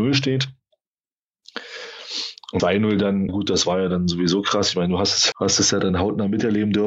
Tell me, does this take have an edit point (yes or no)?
yes